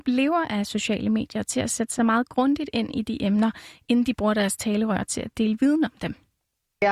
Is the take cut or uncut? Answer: uncut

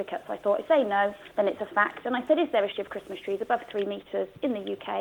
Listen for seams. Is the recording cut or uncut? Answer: cut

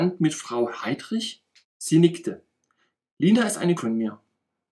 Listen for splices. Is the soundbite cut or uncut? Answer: cut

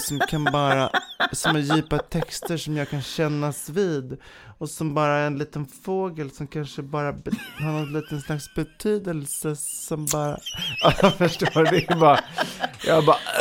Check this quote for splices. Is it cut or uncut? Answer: uncut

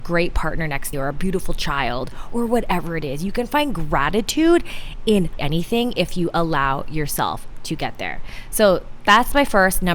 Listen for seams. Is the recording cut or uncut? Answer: cut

